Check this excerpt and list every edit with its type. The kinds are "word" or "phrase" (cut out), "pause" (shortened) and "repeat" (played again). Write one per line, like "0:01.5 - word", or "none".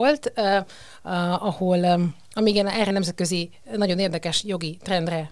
0:02.9 - word